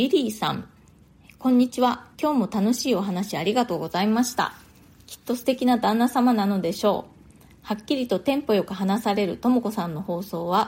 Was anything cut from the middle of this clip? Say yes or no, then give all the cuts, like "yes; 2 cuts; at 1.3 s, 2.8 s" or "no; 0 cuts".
yes; 1 cut; at 2.1 s